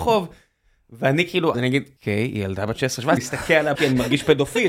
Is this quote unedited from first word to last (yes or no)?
no